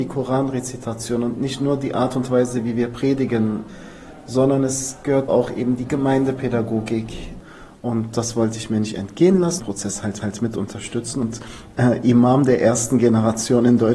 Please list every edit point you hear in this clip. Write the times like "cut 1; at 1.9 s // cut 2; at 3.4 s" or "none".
cut 1; at 5.3 s // cut 2; at 9.6 s // cut 3; at 10.2 s